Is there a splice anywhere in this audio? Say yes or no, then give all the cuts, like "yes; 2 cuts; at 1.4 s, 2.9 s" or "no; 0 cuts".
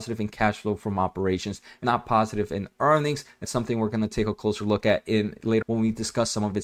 yes; 3 cuts; at 1.8 s, 3.4 s, 5.6 s